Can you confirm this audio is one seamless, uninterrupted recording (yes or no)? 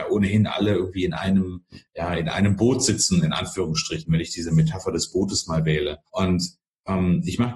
no